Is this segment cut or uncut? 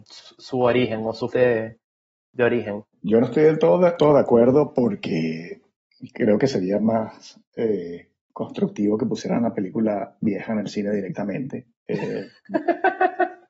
cut